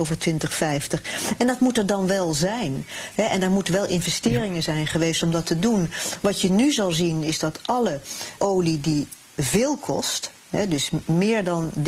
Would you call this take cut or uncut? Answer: cut